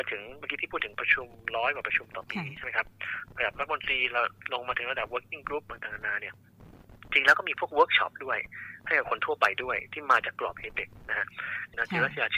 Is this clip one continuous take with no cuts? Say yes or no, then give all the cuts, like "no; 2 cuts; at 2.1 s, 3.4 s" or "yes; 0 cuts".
yes; 0 cuts